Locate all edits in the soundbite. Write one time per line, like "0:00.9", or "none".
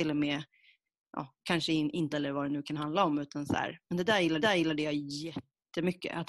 0:02.1
0:04.4